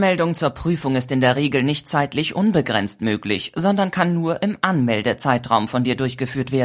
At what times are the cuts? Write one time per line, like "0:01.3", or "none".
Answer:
none